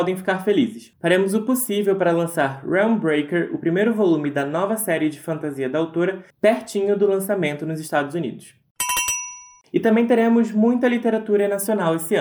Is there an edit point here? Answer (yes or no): no